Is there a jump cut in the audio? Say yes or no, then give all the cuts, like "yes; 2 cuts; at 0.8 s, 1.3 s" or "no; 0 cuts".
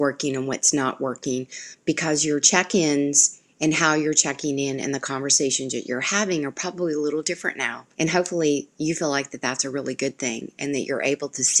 yes; 1 cut; at 7.9 s